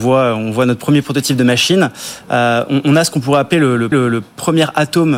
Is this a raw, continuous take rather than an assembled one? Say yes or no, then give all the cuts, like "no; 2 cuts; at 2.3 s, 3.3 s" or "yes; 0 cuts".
no; 1 cut; at 3.9 s